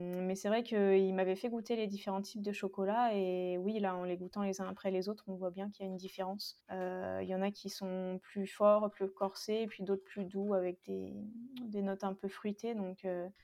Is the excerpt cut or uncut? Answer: cut